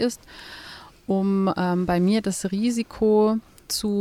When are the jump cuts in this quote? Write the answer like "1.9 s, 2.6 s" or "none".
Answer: none